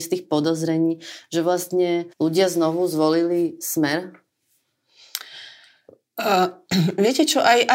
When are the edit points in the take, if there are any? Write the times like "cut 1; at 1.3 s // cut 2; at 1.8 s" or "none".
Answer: cut 1; at 2.1 s